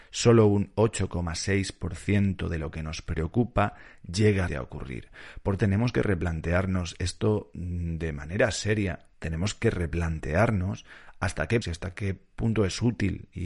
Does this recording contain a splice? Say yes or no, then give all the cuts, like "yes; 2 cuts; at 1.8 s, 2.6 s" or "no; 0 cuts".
yes; 4 cuts; at 4.5 s, 5.6 s, 9.1 s, 11.6 s